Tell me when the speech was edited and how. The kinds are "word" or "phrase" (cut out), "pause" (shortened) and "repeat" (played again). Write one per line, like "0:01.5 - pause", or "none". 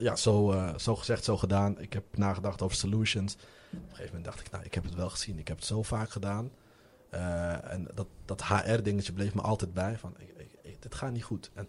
none